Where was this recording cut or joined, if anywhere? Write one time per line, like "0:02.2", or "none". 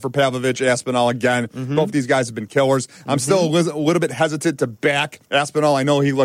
0:05.2

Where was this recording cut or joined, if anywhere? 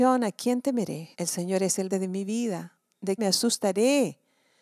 0:01.1
0:01.9
0:03.2

